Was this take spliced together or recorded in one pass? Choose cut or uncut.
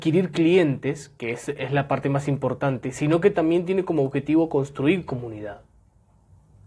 uncut